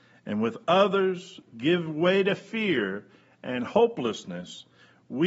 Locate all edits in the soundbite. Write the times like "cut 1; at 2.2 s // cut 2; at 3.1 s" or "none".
none